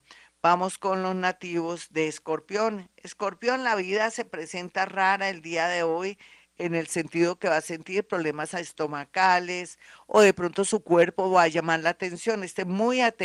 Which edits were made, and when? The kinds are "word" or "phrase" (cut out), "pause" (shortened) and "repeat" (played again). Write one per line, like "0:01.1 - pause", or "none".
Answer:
none

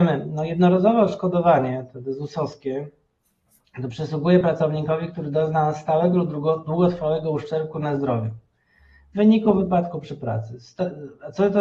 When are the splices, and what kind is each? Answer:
none

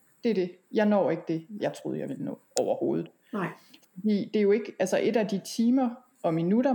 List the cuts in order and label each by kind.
0:01.6 - word

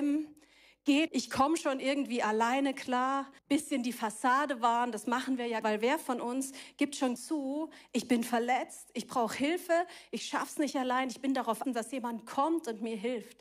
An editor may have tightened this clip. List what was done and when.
0:01.1 - word
0:03.4 - pause
0:05.6 - phrase
0:07.2 - phrase
0:11.6 - word

